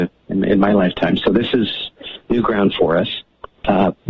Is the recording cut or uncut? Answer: uncut